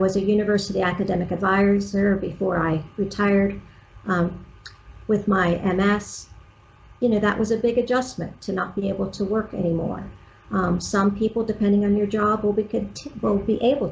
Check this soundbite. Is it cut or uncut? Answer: uncut